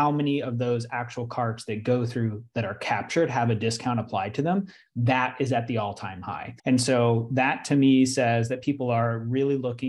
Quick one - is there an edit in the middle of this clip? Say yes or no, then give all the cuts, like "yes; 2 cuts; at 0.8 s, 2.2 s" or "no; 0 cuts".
yes; 1 cut; at 6.6 s